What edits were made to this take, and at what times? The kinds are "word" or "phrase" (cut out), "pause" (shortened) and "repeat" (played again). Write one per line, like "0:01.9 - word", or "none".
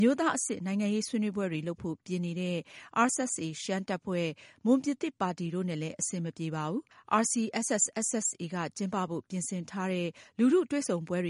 0:03.1 - word
0:06.9 - pause